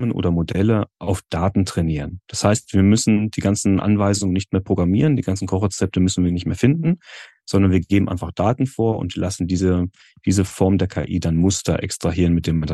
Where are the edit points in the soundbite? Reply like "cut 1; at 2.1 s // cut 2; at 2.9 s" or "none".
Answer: none